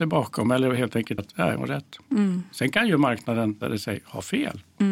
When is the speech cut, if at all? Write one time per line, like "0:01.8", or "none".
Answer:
0:01.2
0:01.6
0:03.6